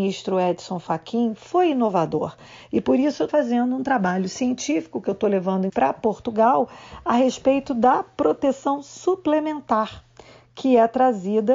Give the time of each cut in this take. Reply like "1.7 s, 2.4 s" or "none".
3.3 s, 5.7 s